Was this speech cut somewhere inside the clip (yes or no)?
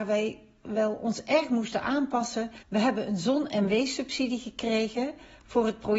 yes